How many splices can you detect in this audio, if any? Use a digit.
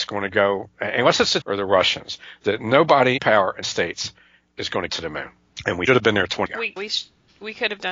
7